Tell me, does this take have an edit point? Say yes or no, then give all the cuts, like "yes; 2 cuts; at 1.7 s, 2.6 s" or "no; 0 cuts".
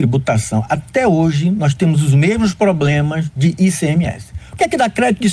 no; 0 cuts